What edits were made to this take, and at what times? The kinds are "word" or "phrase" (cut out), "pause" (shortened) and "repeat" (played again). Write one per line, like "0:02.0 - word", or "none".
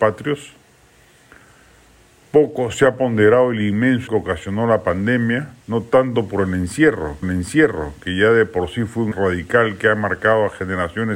0:04.1 - phrase
0:05.6 - pause
0:07.2 - repeat
0:09.1 - word